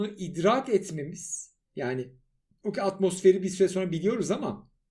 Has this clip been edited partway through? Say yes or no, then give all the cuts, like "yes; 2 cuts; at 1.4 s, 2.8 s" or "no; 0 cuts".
no; 0 cuts